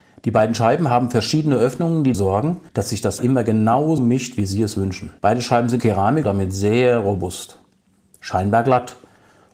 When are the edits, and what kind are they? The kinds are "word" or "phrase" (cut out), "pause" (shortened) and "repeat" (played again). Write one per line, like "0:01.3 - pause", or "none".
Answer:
0:02.1 - word
0:02.7 - pause
0:03.2 - word
0:04.0 - word
0:05.2 - pause
0:05.8 - word
0:06.2 - word